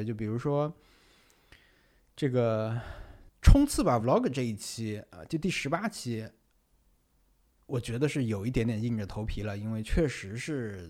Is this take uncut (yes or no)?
yes